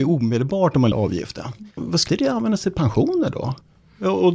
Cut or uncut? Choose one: cut